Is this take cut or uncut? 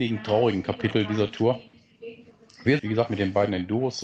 cut